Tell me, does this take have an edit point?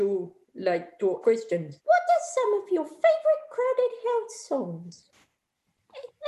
yes; 2 cuts; at 1.2 s, 1.8 s

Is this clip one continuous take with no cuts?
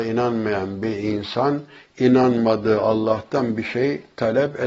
yes; 0 cuts

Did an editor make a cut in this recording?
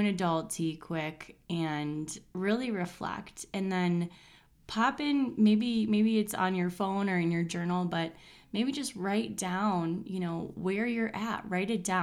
no; 0 cuts

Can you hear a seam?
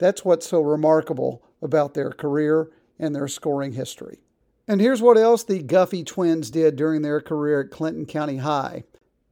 no; 0 cuts

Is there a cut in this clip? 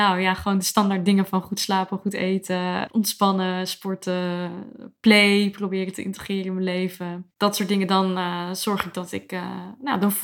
no; 0 cuts

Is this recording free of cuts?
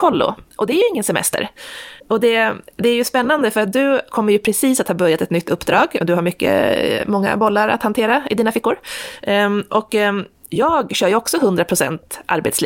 no; 1 cut; at 2.0 s

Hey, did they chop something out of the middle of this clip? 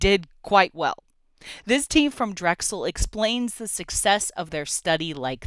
no; 0 cuts

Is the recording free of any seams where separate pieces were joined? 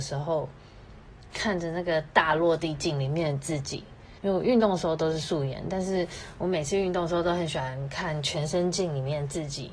no; 1 cut; at 4.2 s

